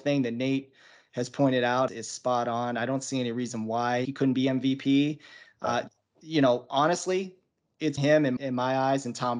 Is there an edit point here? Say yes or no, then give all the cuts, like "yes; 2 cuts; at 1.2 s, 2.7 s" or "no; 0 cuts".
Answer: yes; 4 cuts; at 1.9 s, 4.0 s, 8.0 s, 8.4 s